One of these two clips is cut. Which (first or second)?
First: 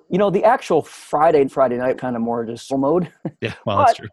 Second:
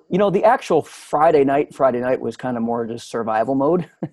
first